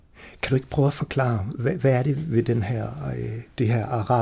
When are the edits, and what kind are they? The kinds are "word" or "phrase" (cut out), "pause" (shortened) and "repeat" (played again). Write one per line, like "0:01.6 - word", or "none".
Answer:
none